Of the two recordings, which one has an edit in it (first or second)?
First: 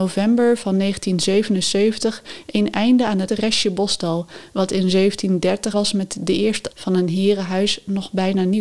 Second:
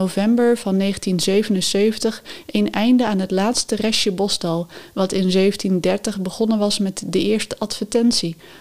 first